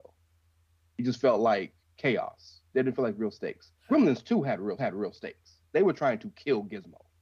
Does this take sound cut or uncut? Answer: cut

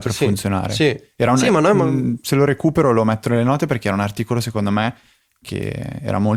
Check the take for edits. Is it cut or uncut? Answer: uncut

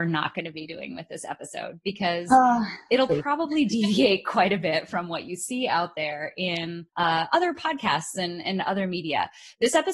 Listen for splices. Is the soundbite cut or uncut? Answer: cut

